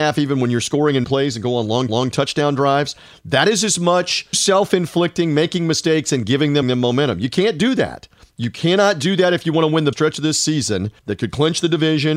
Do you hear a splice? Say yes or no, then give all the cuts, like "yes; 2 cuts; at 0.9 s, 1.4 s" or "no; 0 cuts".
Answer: yes; 7 cuts; at 1.0 s, 1.9 s, 4.3 s, 6.6 s, 8.2 s, 9.9 s, 11.0 s